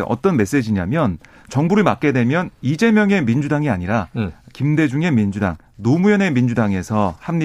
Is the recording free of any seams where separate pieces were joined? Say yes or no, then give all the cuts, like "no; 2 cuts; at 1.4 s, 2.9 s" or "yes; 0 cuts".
yes; 0 cuts